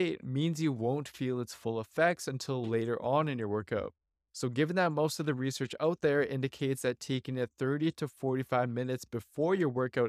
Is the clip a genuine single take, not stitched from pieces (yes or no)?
yes